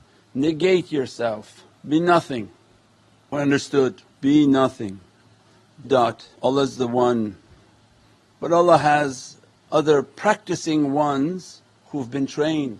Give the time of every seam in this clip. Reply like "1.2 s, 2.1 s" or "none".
1.7 s, 3.3 s, 4.1 s, 5.8 s, 6.4 s